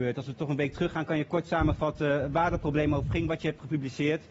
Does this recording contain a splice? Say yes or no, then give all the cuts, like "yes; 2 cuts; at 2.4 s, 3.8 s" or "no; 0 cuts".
no; 0 cuts